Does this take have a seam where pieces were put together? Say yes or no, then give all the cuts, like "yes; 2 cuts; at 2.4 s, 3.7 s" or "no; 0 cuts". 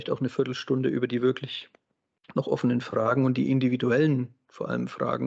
no; 0 cuts